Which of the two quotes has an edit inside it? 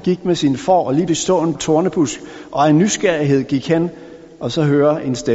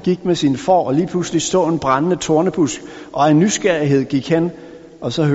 first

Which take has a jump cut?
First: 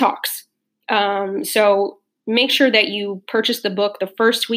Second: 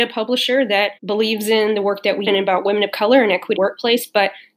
second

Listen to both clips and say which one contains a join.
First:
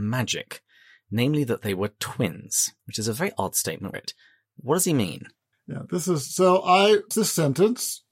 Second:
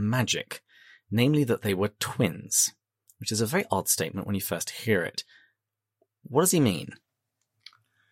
first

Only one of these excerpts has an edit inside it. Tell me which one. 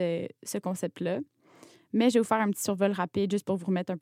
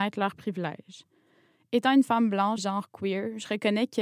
second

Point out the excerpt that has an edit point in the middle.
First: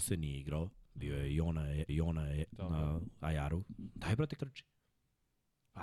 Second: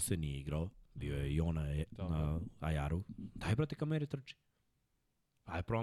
first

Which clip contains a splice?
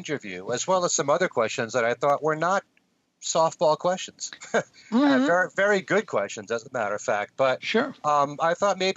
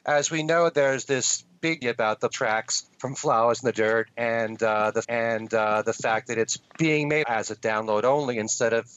second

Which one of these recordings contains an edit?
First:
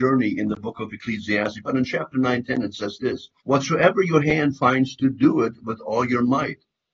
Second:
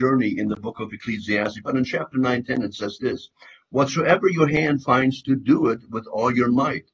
first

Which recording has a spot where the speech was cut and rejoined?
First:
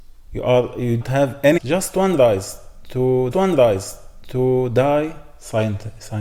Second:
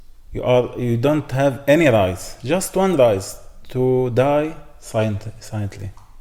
first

